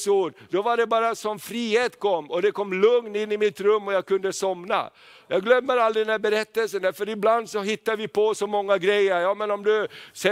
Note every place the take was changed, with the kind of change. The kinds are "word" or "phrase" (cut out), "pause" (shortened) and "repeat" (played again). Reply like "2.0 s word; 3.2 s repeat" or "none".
none